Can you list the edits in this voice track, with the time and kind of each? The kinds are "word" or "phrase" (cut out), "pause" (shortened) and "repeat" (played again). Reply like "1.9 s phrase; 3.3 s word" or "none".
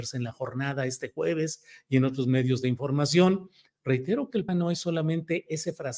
4.5 s word